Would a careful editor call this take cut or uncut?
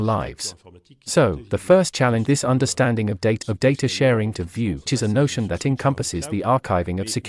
cut